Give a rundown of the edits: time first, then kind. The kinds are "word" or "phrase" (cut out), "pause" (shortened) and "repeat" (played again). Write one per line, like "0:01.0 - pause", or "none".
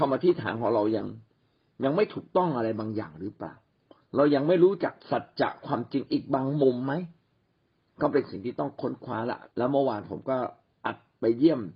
0:05.0 - pause
0:09.5 - pause